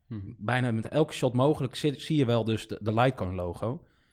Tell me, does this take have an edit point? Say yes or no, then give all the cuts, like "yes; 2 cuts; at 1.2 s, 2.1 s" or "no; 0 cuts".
no; 0 cuts